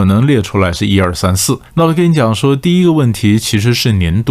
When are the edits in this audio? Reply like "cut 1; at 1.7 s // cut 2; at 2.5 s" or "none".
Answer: cut 1; at 1.7 s